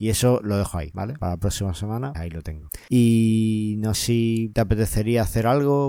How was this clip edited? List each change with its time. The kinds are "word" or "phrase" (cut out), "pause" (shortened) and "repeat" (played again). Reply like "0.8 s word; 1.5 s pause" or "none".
2.1 s word; 3.9 s word